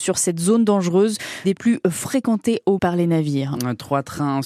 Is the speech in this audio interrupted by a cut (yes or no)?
yes